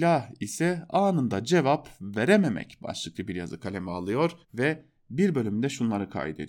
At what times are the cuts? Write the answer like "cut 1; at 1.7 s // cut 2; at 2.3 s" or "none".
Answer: cut 1; at 4.4 s